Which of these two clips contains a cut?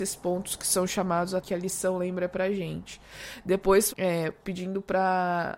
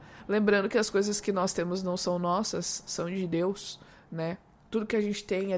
first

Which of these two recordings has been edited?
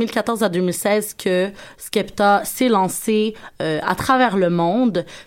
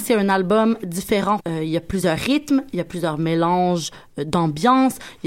second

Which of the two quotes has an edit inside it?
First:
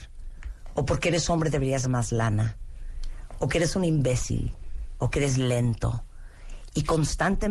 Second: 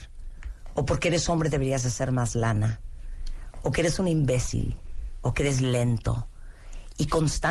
first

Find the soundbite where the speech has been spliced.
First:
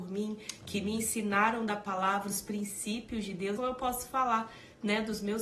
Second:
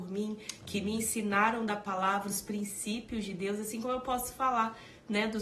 first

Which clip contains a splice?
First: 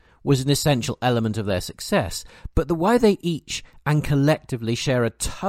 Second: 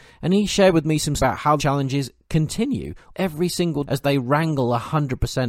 second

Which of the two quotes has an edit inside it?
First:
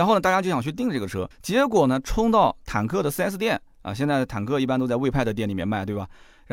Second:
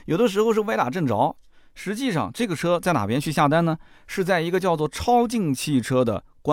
first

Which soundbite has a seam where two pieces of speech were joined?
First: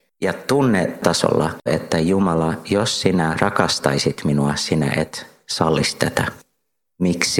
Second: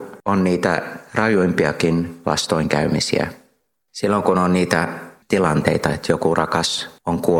first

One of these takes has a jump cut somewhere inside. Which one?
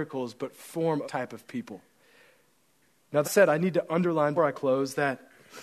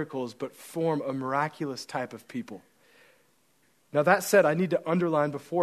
first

